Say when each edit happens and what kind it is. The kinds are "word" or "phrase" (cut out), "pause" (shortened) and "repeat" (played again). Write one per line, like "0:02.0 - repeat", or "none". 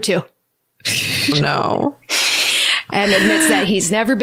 0:01.3 - word